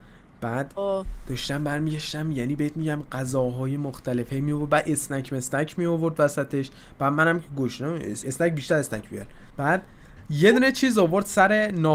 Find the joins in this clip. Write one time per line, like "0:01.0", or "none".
0:08.2
0:09.5